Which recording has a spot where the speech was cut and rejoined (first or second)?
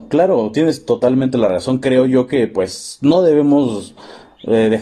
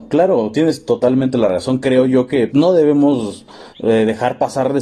second